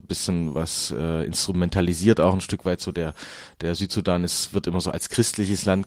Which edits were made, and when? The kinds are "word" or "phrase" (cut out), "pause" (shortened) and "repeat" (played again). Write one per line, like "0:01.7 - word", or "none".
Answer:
none